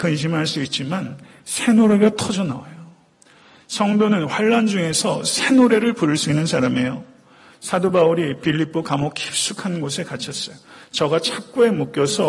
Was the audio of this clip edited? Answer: no; 0 cuts

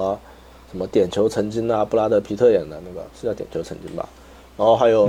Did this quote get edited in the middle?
yes; 1 cut; at 3.1 s

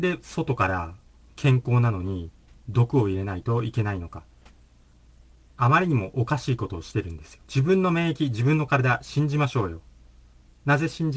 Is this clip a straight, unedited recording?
no; 1 cut; at 7.4 s

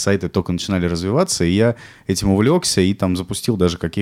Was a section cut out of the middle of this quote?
no; 0 cuts

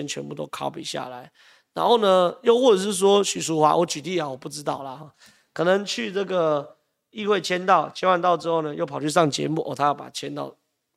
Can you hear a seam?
no; 0 cuts

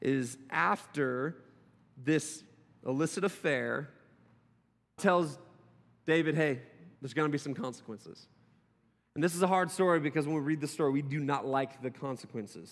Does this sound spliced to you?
yes; 2 cuts; at 5.0 s, 7.0 s

